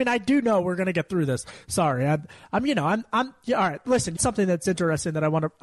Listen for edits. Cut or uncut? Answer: cut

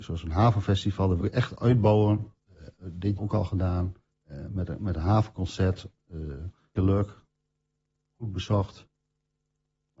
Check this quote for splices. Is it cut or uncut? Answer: cut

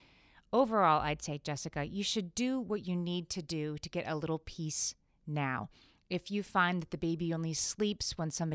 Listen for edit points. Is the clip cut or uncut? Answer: uncut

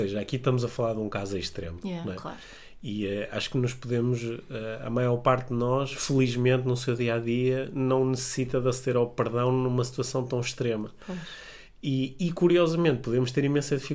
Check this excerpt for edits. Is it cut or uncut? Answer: uncut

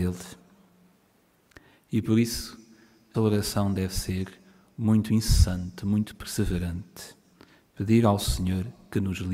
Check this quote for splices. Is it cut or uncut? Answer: cut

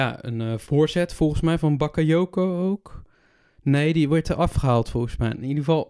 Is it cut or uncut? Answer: uncut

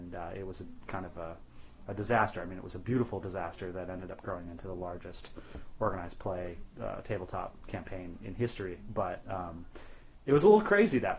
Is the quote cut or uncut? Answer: uncut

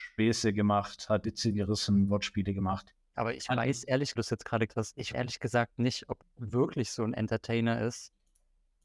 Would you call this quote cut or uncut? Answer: cut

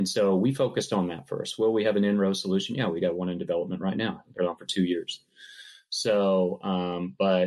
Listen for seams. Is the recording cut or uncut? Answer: cut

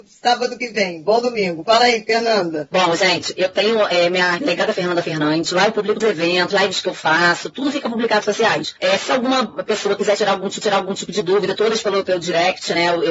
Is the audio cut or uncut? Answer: cut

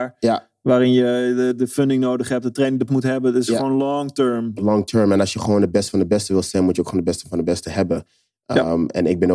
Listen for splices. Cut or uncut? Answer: cut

